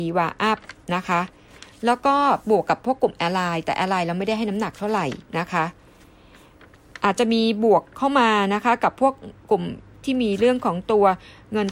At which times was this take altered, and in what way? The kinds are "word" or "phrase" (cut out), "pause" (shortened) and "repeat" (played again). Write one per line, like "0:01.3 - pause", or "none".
0:05.3 - pause
0:09.4 - pause
0:10.0 - word